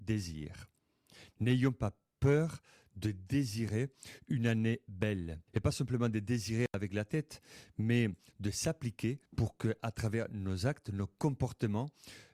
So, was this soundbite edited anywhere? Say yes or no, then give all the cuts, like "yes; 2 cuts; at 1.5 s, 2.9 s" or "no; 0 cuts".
yes; 2 cuts; at 5.5 s, 9.3 s